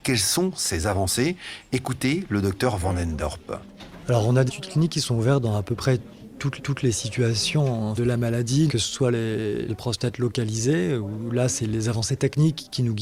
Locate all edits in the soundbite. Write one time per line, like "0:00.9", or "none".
0:04.5
0:06.6
0:08.0
0:08.7
0:09.7

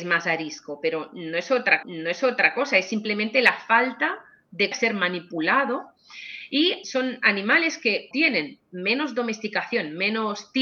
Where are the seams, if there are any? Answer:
0:01.8
0:04.7
0:06.8
0:08.1

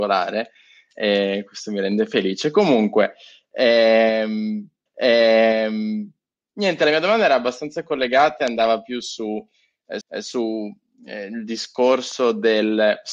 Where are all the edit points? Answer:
0:04.9
0:10.0

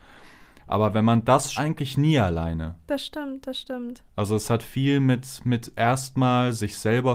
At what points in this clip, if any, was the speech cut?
0:01.6

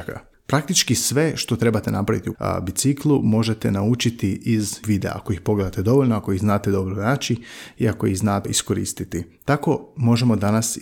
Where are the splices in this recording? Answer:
0:02.3
0:04.8
0:08.4

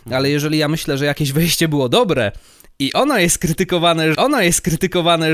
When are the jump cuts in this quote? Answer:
0:04.1

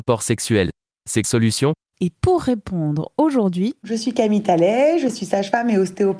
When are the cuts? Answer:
0:01.2

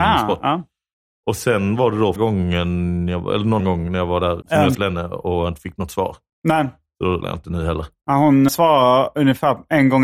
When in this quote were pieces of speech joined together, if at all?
0:02.2
0:03.6
0:04.4
0:04.7
0:07.2
0:08.5

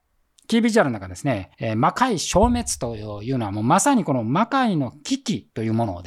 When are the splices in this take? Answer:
0:01.5

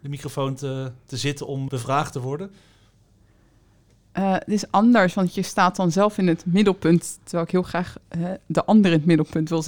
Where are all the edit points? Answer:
0:01.7

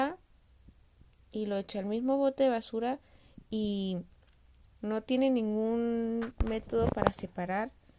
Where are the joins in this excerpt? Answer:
none

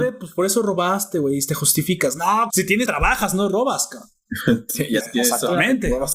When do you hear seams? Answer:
0:02.5
0:02.9
0:05.0

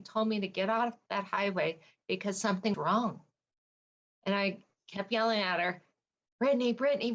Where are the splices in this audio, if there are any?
0:02.7

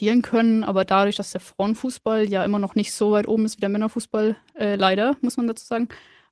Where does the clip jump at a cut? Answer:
none

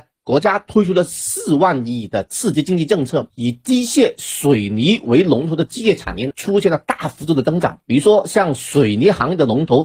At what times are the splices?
0:07.8

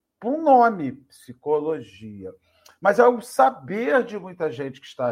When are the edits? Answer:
none

